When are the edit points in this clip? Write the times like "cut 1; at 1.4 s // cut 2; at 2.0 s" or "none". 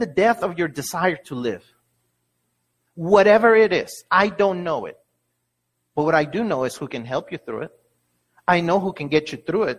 none